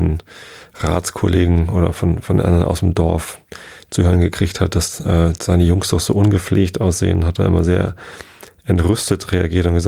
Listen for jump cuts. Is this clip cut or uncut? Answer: uncut